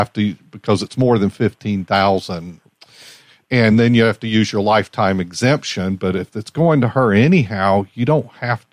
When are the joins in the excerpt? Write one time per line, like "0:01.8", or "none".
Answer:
none